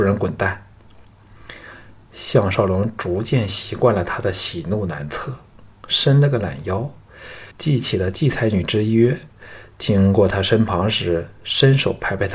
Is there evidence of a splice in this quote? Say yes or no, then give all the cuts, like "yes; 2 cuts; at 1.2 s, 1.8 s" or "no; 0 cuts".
yes; 2 cuts; at 5.7 s, 7.5 s